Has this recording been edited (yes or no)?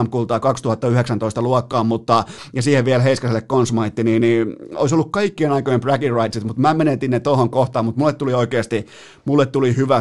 no